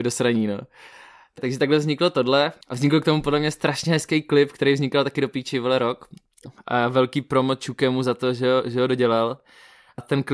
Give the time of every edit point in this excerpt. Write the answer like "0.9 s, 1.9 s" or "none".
2.6 s